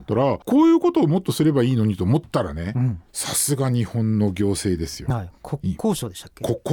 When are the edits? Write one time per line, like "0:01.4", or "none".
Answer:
0:03.1

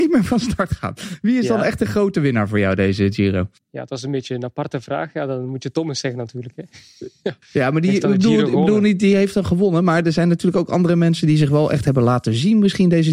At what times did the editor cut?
0:03.6
0:07.4

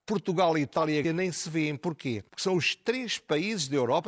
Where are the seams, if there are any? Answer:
0:01.0
0:02.3

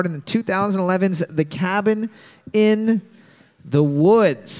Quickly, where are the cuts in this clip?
none

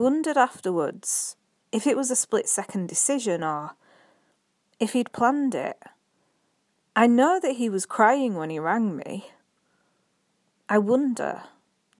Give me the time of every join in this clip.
none

